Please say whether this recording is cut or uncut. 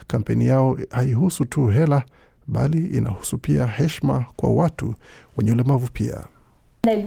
uncut